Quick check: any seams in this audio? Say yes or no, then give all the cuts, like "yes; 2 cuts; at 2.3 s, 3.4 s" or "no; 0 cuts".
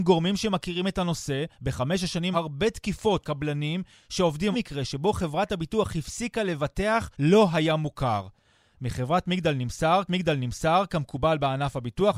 yes; 6 cuts; at 1.5 s, 2.3 s, 3.2 s, 4.5 s, 7.1 s, 10.1 s